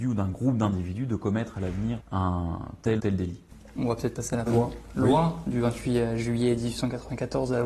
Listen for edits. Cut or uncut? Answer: cut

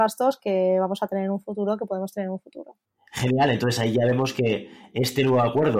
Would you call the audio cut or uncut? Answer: uncut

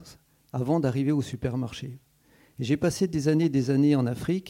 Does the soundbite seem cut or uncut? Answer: uncut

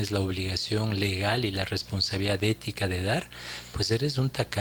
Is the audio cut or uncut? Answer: uncut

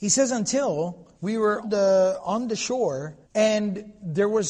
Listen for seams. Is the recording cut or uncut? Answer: cut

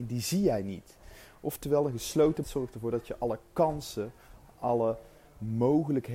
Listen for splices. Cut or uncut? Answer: cut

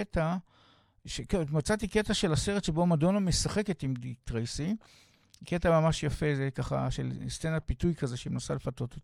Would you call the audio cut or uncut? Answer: uncut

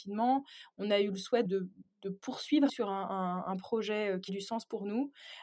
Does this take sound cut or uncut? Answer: cut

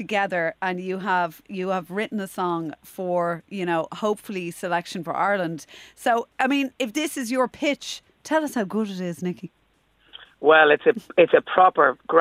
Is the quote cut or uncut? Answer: uncut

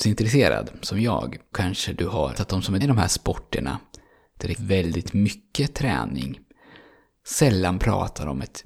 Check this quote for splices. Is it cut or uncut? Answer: cut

